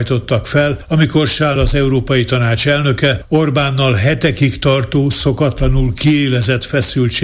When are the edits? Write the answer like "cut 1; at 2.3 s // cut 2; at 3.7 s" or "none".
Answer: cut 1; at 1.6 s